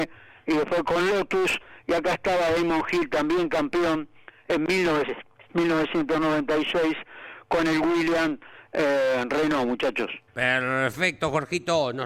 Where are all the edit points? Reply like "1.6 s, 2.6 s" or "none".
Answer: 5.5 s, 10.3 s